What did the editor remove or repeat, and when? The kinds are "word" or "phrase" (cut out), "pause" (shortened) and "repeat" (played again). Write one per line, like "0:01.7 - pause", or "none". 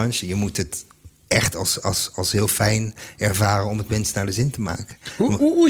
none

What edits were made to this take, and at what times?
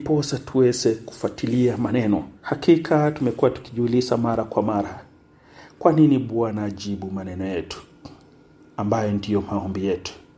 0:02.4 - pause

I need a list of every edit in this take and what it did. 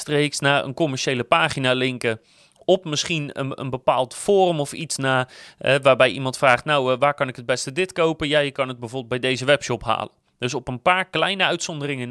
none

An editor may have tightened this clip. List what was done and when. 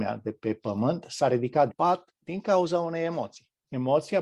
0:01.7 - word

